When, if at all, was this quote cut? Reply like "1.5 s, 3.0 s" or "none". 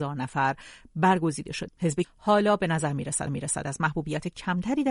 1.7 s, 2.0 s, 3.3 s